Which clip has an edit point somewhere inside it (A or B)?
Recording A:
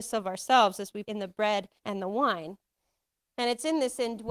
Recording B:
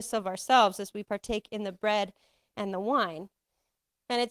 A